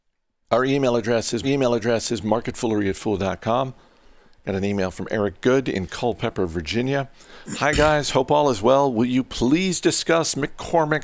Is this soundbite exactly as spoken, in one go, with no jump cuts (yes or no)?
no